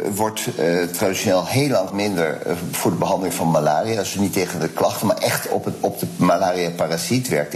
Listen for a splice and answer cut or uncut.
cut